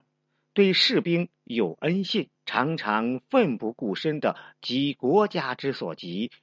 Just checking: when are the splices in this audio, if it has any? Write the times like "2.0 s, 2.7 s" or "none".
2.3 s